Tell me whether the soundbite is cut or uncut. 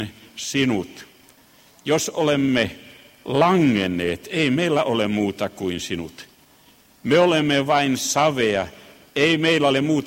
uncut